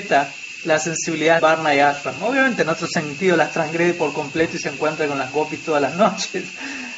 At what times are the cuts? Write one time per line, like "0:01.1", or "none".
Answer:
0:01.4